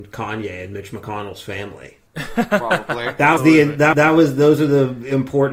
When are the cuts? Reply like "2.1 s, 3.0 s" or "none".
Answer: 2.1 s, 3.4 s, 3.9 s